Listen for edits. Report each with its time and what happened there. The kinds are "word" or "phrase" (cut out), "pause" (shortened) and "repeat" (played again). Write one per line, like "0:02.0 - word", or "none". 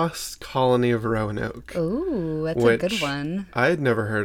none